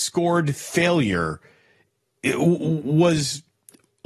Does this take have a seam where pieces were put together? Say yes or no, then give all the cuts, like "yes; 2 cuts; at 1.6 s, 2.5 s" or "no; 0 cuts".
no; 0 cuts